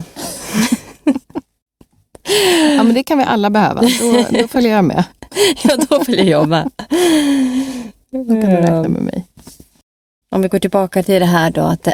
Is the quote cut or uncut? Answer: uncut